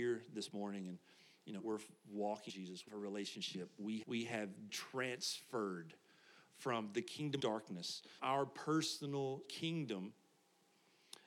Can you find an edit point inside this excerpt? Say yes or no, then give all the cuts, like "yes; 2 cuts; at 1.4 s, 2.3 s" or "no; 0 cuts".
yes; 8 cuts; at 1.6 s, 2.5 s, 2.9 s, 4.0 s, 4.7 s, 7.4 s, 8.2 s, 9.4 s